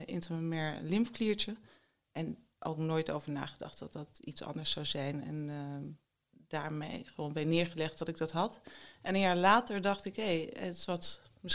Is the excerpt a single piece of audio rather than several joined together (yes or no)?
yes